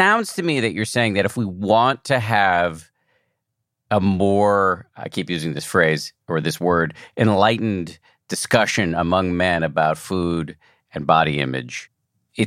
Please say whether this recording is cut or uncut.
uncut